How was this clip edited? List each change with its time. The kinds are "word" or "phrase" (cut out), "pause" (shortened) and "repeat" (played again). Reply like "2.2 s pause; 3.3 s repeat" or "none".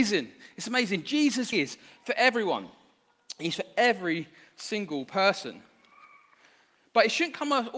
1.5 s word